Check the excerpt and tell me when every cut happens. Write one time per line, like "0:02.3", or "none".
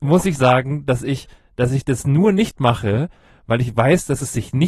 none